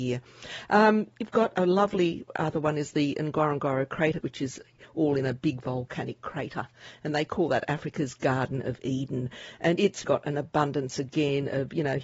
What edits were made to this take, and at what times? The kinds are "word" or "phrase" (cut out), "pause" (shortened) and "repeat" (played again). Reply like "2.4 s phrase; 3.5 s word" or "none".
4.2 s phrase; 10.0 s word